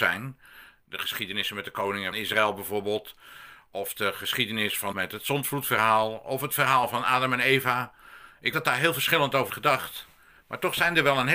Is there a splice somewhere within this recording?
yes; 4 cuts; at 2.1 s, 4.9 s, 8.5 s, 9.5 s

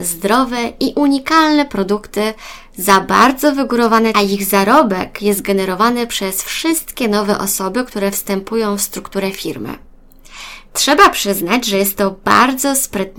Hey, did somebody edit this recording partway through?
yes; 1 cut; at 4.1 s

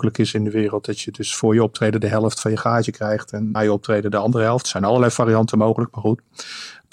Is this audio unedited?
no; 1 cut; at 3.5 s

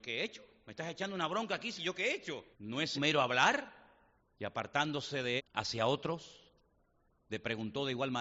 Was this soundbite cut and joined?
yes; 5 cuts; at 1.8 s, 2.5 s, 2.9 s, 4.2 s, 5.4 s

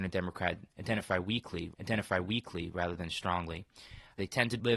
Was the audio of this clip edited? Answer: yes; 1 cut; at 1.7 s

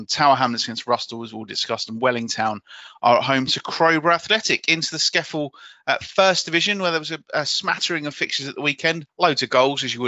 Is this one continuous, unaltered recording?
no; 1 cut; at 9.1 s

